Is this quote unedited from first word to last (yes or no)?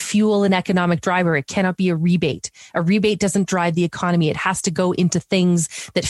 yes